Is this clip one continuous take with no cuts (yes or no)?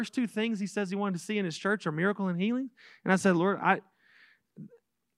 yes